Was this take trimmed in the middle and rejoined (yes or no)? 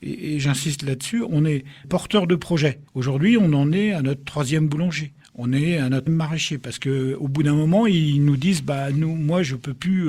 yes